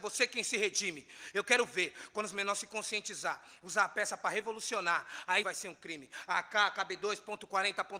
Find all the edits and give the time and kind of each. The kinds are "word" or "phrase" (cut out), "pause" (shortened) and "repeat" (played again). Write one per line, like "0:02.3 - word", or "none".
0:05.4 - word